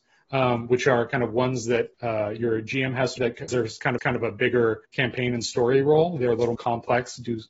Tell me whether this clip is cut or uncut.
cut